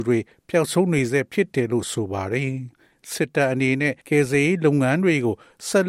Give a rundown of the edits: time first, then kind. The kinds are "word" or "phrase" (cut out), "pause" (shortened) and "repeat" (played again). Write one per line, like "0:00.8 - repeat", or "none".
0:04.0 - pause